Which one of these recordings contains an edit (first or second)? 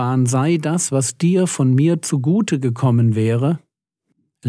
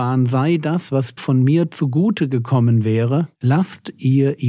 second